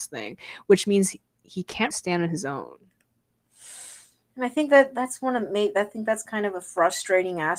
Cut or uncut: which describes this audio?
cut